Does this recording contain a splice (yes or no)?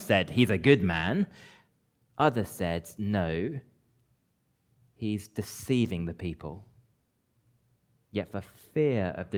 no